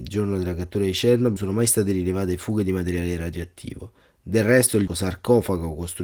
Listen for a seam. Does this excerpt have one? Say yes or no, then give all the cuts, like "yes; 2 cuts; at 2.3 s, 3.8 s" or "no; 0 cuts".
yes; 2 cuts; at 1.4 s, 4.9 s